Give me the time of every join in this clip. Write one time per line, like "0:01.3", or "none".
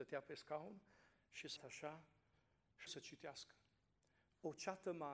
0:01.6
0:02.9